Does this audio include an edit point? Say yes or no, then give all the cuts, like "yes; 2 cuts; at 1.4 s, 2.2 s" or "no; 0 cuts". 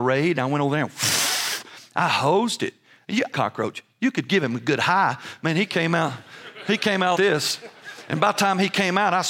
yes; 2 cuts; at 3.3 s, 7.1 s